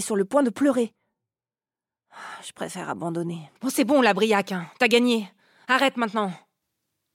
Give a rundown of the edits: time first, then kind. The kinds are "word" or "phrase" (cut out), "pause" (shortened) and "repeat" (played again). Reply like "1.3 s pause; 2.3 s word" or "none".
3.6 s pause